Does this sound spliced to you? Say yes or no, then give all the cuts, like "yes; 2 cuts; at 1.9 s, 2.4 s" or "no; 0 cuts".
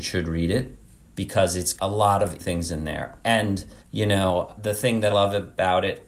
yes; 5 cuts; at 1.8 s, 2.4 s, 3.8 s, 4.6 s, 5.1 s